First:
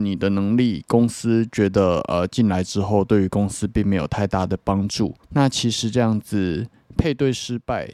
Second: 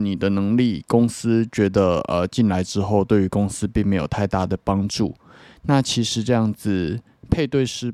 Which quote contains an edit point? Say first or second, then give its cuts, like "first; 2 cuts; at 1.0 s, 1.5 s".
first; 1 cut; at 5.2 s